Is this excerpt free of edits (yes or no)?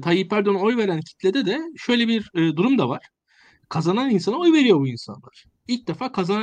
yes